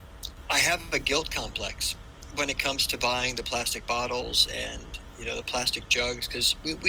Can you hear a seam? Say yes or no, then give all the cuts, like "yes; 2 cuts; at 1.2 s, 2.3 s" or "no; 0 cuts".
no; 0 cuts